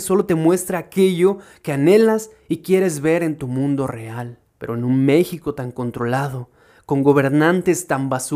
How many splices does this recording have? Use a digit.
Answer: 1